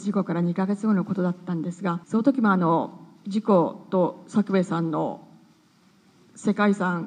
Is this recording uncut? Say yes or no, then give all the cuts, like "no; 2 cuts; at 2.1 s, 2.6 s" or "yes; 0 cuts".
no; 1 cut; at 2.0 s